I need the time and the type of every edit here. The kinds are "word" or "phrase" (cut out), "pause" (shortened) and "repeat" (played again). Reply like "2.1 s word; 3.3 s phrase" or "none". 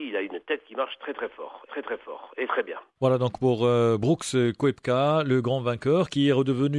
1.7 s repeat